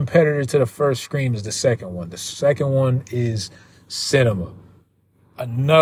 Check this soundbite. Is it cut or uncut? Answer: uncut